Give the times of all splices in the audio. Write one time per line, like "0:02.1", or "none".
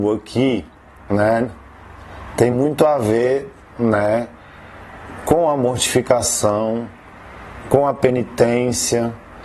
none